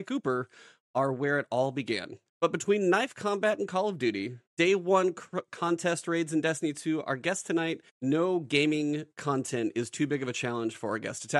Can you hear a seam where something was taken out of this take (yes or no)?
yes